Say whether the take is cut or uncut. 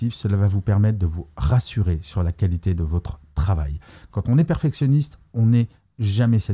uncut